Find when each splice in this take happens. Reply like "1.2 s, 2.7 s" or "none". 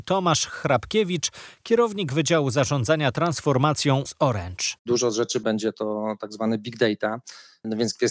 4.0 s, 4.8 s, 5.4 s